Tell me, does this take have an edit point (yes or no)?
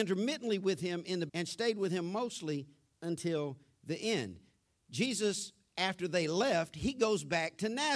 yes